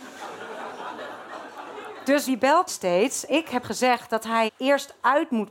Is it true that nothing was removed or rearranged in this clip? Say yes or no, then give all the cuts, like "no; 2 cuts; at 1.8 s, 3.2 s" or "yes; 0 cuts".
no; 5 cuts; at 2.3 s, 2.7 s, 3.3 s, 3.6 s, 4.5 s